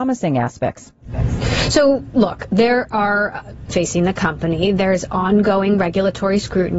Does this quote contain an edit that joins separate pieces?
yes; 1 cut; at 3.7 s

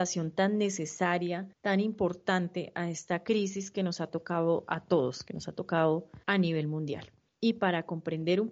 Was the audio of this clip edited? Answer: yes; 3 cuts; at 1.5 s, 6.2 s, 7.3 s

